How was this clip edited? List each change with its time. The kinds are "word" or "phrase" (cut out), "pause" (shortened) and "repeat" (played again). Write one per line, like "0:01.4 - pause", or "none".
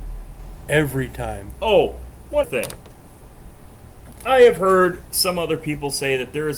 0:02.4 - word